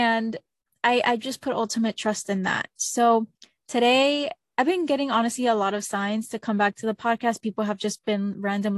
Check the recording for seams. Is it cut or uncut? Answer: cut